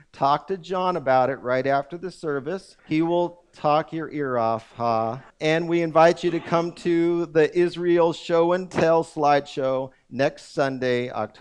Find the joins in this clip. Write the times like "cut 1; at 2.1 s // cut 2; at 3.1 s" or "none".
cut 1; at 2.8 s // cut 2; at 5.3 s

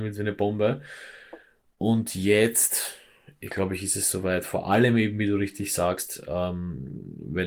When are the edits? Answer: none

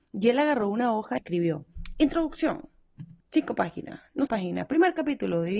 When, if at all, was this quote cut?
cut 1; at 1.2 s // cut 2; at 3.2 s // cut 3; at 4.3 s

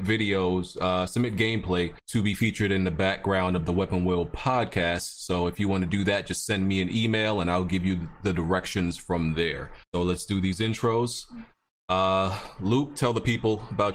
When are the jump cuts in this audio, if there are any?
cut 1; at 2.0 s // cut 2; at 9.8 s

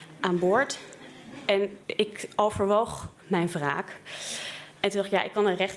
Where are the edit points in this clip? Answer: cut 1; at 1.8 s // cut 2; at 3.2 s // cut 3; at 4.8 s

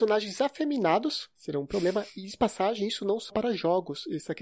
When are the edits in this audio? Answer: cut 1; at 3.3 s

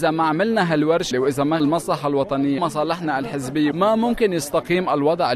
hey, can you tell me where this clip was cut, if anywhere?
cut 1; at 1.1 s // cut 2; at 1.6 s // cut 3; at 2.6 s // cut 4; at 3.7 s

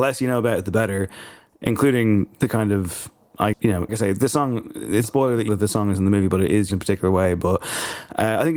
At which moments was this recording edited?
cut 1; at 3.5 s // cut 2; at 3.9 s // cut 3; at 5.0 s // cut 4; at 5.5 s // cut 5; at 6.7 s

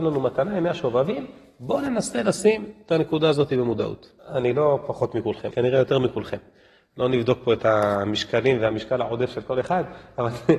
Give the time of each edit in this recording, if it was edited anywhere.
cut 1; at 4.2 s // cut 2; at 5.5 s

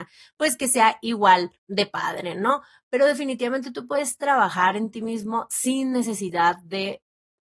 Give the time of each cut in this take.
cut 1; at 1.6 s

